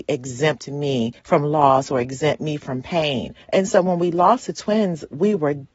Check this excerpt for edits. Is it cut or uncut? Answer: cut